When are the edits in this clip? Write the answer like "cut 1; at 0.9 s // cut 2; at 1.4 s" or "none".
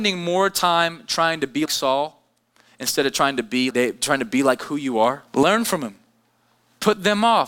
cut 1; at 1.7 s // cut 2; at 3.7 s // cut 3; at 5.3 s